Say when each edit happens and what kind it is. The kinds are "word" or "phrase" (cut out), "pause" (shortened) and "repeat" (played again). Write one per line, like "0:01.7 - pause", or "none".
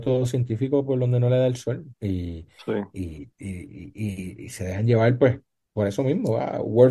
0:01.9 - pause
0:03.3 - pause